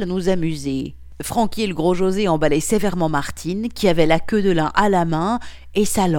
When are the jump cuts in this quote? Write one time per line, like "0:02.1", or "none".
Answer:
none